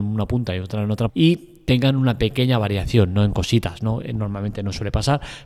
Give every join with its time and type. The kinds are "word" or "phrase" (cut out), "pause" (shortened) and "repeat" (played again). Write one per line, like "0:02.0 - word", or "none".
0:01.1 - word